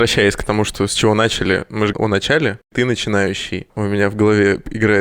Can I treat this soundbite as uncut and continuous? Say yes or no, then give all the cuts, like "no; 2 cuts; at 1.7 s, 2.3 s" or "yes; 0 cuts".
no; 1 cut; at 1.9 s